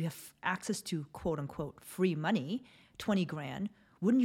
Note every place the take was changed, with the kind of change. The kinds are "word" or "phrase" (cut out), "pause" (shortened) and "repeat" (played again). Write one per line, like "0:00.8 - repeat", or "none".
none